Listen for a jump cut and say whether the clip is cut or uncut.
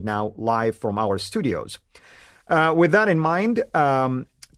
uncut